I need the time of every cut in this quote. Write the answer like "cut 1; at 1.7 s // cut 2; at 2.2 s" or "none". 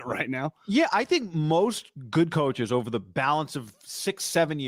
none

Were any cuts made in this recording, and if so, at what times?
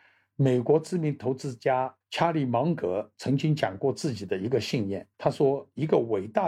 cut 1; at 2.0 s // cut 2; at 5.1 s

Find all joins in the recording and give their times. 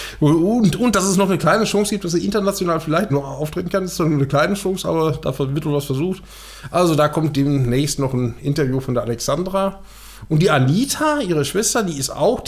cut 1; at 3.1 s

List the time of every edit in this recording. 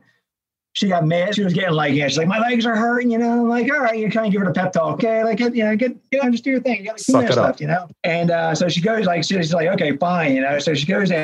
cut 1; at 1.3 s // cut 2; at 5.0 s // cut 3; at 6.2 s // cut 4; at 8.0 s

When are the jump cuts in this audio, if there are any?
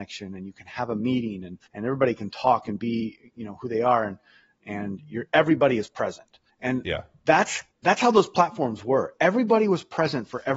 cut 1; at 1.7 s // cut 2; at 6.5 s // cut 3; at 7.7 s

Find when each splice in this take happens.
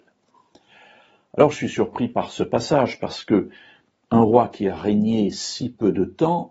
none

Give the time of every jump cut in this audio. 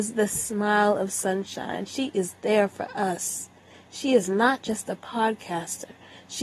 none

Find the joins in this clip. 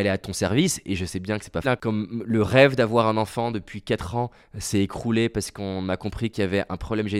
cut 1; at 1.6 s

